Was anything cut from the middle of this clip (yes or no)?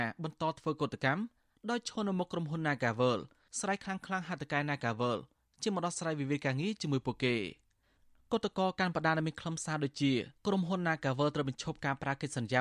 yes